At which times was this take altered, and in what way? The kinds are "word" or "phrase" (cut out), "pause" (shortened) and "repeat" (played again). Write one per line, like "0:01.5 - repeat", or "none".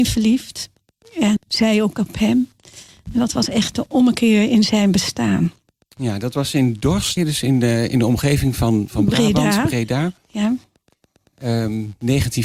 0:01.4 - word
0:07.2 - word

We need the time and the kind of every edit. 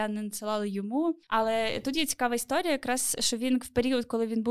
0:01.2 - pause

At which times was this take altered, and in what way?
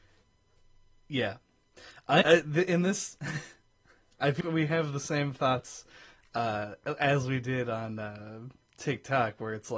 0:02.2 - word
0:04.4 - word

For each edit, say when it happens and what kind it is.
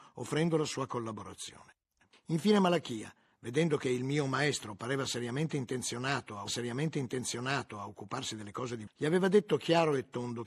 0:06.5 - repeat
0:08.9 - word

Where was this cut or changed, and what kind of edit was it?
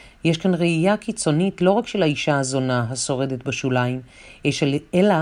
none

